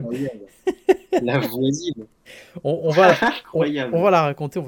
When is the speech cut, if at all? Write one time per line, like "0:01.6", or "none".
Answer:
none

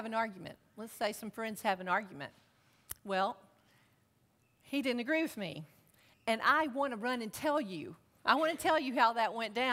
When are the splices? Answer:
none

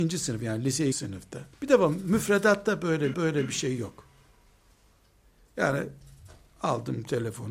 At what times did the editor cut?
0:00.9
0:01.5
0:03.1

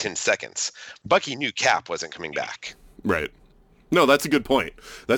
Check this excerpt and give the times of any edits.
none

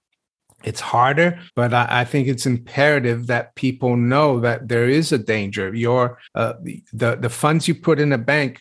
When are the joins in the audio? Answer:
0:01.5
0:06.3

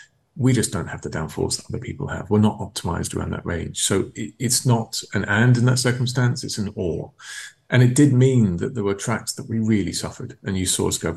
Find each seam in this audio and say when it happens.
none

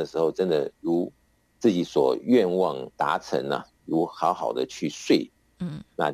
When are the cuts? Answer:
0:02.9

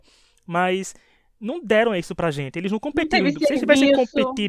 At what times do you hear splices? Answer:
none

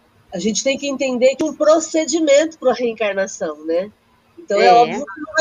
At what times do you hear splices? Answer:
0:01.4

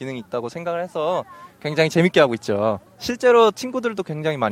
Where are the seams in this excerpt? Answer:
0:02.9

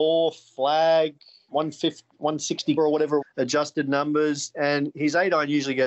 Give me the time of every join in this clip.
0:01.5
0:02.8
0:03.2

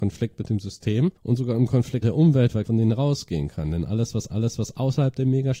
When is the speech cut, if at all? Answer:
0:01.2
0:02.0
0:02.6
0:04.3

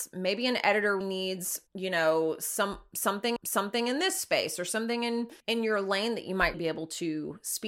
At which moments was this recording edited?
0:01.0
0:01.7
0:03.4
0:05.4
0:06.5

